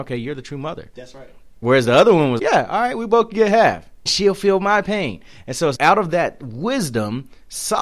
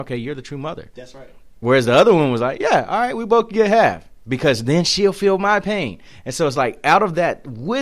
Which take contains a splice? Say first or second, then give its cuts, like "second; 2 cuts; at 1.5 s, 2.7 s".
first; 3 cuts; at 2.4 s, 4.1 s, 5.8 s